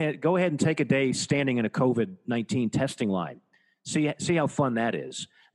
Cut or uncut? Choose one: uncut